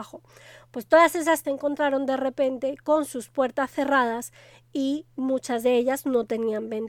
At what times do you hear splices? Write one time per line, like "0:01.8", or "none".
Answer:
0:01.4